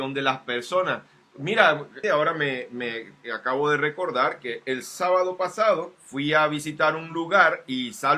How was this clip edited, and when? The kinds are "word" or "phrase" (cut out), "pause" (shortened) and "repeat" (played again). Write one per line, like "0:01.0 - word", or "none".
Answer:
0:02.0 - word
0:06.0 - pause